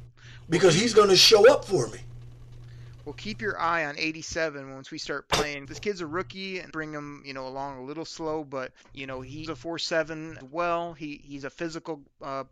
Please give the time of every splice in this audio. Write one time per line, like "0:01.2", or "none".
0:05.6
0:06.7
0:08.8
0:09.5
0:10.4